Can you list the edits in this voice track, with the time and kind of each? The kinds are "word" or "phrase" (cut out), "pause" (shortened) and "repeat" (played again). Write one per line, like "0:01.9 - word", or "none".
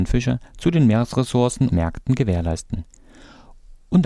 0:01.7 - word